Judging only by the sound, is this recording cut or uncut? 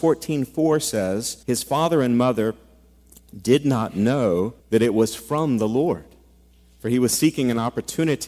cut